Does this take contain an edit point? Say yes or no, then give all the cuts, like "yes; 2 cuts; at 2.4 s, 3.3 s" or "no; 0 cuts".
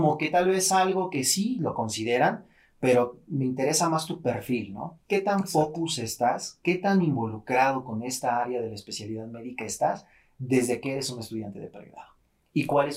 no; 0 cuts